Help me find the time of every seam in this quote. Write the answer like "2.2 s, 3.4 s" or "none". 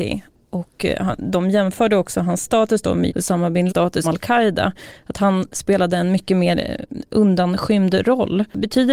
3.1 s, 3.7 s, 4.0 s